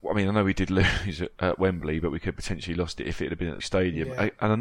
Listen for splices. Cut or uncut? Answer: cut